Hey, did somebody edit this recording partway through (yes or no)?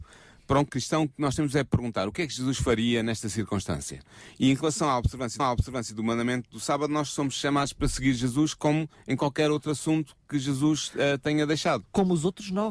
yes